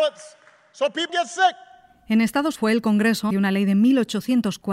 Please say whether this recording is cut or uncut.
cut